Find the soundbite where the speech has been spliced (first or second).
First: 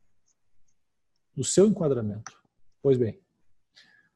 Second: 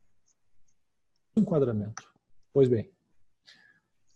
second